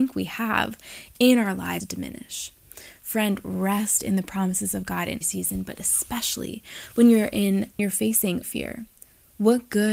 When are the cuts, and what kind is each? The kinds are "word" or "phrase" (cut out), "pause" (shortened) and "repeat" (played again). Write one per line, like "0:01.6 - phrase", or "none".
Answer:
0:01.8 - word
0:05.2 - word
0:07.8 - word
0:08.4 - word